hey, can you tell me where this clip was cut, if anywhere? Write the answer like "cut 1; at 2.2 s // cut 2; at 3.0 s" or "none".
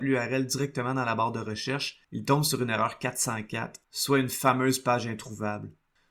cut 1; at 2.0 s // cut 2; at 3.8 s